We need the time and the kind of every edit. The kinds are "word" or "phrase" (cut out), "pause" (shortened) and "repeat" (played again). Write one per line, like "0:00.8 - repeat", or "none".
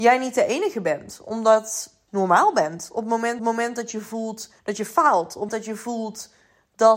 0:02.1 - phrase
0:03.4 - repeat
0:04.6 - pause
0:05.5 - word